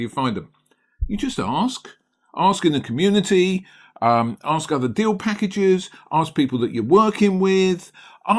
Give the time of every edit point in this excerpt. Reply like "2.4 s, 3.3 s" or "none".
none

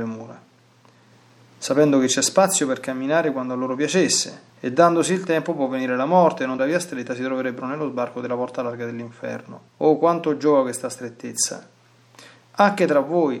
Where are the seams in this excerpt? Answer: 4.5 s, 6.6 s, 9.7 s

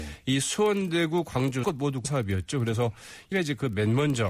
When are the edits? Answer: 1.6 s, 2.0 s, 3.3 s

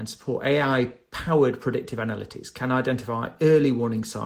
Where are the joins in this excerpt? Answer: none

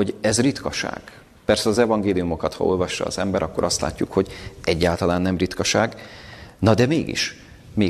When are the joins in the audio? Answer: none

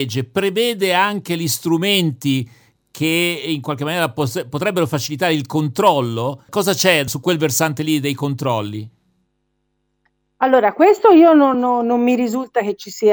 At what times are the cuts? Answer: none

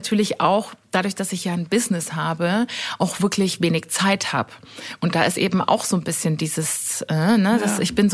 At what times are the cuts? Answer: none

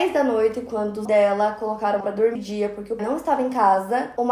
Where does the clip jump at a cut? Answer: 1.1 s, 2.0 s, 2.4 s, 3.0 s

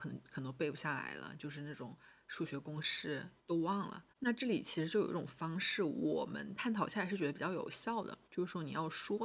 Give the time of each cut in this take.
3.4 s, 4.1 s, 8.2 s

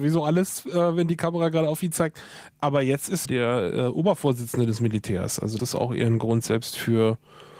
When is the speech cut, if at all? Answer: 3.3 s, 5.6 s

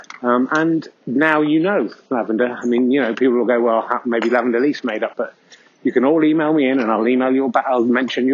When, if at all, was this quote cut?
none

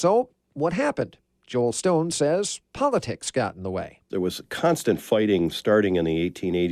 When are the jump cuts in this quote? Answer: none

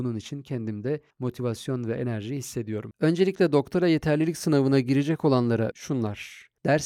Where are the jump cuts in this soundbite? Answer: 1.1 s, 5.7 s

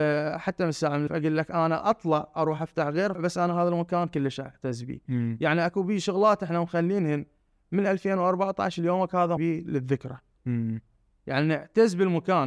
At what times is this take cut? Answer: 1.1 s, 3.1 s, 9.4 s

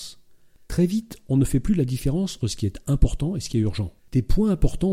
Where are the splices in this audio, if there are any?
2.4 s, 4.0 s

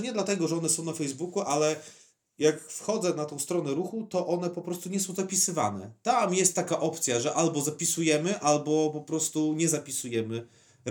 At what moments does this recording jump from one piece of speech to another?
none

